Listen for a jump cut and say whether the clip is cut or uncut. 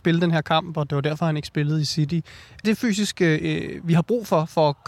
cut